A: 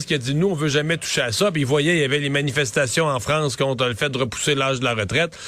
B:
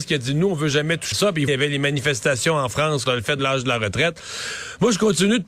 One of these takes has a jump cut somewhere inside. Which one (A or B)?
B